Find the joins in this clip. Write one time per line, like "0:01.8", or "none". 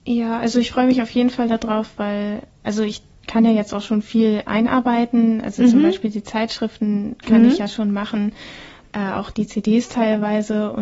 none

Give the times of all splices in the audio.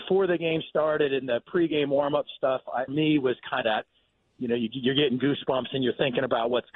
0:02.9
0:03.6

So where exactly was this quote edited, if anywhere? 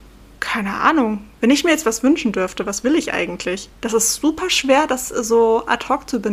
0:01.3
0:03.7

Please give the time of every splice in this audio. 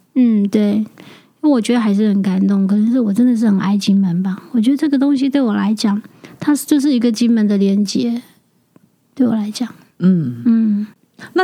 none

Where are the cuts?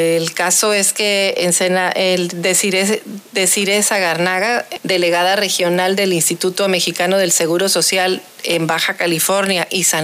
0:04.8

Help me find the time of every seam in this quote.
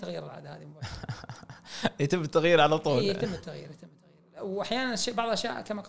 none

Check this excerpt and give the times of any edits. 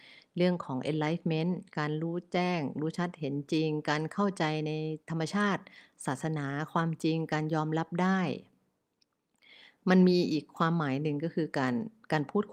0:01.7
0:05.0

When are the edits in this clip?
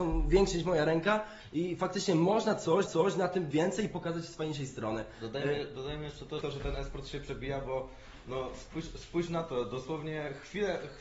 0:02.9
0:03.5
0:06.4

